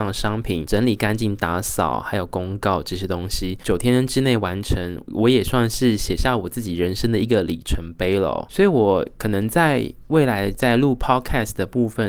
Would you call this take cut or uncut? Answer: uncut